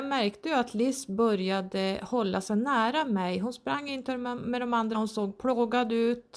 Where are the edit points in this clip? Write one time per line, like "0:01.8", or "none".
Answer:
0:04.9